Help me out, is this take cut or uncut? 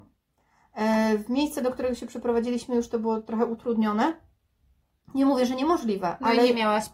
uncut